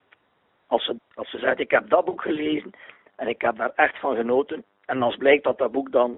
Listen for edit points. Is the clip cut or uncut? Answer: cut